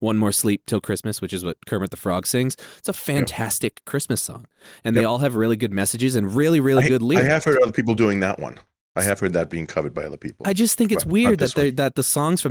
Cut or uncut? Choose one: uncut